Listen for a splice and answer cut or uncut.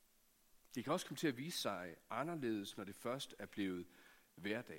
uncut